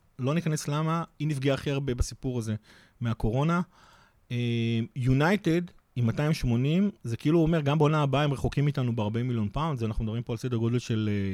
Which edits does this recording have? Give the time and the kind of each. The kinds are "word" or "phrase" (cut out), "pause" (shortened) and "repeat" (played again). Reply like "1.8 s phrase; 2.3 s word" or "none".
none